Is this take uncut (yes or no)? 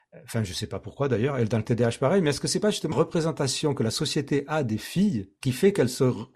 no